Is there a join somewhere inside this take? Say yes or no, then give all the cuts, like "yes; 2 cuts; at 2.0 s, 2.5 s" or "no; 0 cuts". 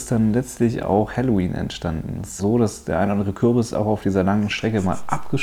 yes; 1 cut; at 2.4 s